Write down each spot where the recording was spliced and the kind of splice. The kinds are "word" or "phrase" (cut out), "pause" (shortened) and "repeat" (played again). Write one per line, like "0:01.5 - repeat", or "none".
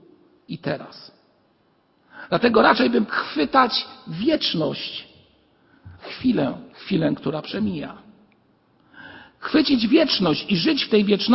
0:03.1 - word
0:06.0 - phrase
0:06.7 - pause